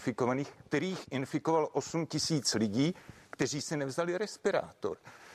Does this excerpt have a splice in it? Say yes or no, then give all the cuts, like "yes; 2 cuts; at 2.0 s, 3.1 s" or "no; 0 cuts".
no; 0 cuts